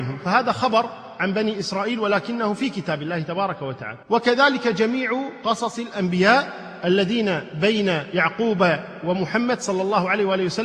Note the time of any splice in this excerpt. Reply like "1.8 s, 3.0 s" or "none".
4.0 s